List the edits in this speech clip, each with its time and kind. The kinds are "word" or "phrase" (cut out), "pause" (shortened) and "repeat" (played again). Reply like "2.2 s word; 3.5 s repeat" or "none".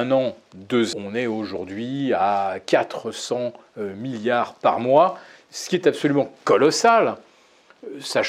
0.9 s phrase